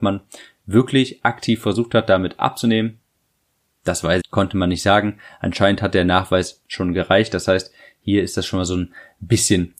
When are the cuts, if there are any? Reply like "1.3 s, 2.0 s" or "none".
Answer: 4.2 s